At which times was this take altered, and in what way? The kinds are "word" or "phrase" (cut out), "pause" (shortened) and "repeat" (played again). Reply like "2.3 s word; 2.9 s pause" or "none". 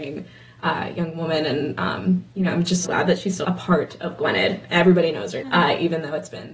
2.8 s word; 3.4 s word; 4.7 s word; 5.4 s word